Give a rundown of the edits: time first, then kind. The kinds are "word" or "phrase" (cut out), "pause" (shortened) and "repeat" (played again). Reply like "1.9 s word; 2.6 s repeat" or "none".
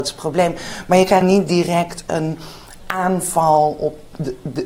1.2 s word